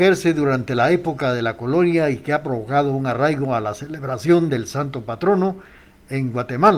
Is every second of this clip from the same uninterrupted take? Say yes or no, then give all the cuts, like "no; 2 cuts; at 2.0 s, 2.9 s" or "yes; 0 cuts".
yes; 0 cuts